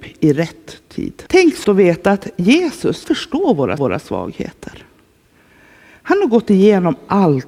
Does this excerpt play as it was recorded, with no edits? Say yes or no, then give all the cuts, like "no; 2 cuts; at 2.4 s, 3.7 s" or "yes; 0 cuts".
no; 4 cuts; at 1.3 s, 1.6 s, 3.0 s, 3.8 s